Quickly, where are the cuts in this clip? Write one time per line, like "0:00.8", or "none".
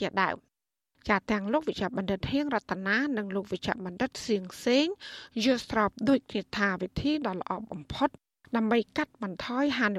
none